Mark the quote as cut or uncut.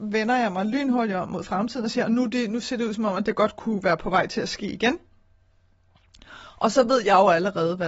uncut